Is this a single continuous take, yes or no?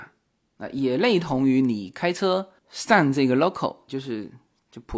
yes